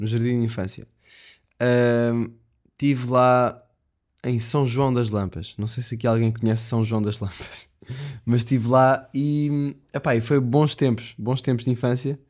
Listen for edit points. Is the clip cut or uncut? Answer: uncut